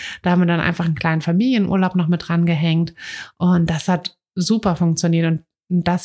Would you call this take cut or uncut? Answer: uncut